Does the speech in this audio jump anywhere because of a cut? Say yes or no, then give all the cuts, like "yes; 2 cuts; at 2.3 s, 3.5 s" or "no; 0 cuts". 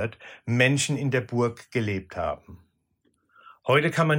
no; 0 cuts